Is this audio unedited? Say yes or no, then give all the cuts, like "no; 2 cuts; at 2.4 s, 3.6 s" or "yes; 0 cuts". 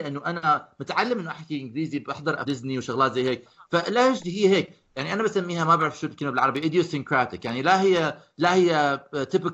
no; 1 cut; at 2.4 s